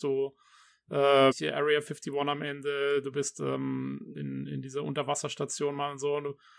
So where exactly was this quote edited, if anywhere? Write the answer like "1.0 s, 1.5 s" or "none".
1.3 s, 4.1 s